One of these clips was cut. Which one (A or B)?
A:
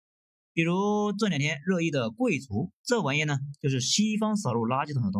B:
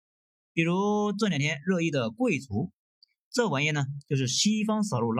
A